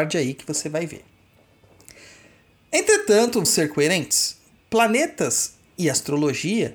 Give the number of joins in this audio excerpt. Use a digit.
1